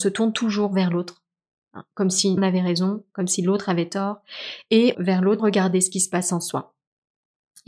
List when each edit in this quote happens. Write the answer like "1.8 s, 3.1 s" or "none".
2.4 s, 4.9 s, 5.4 s